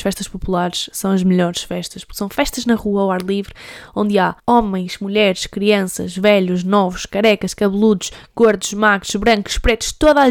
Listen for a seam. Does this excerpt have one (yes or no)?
yes